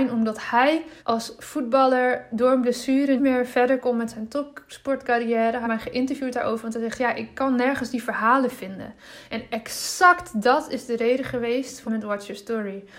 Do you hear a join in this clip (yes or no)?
yes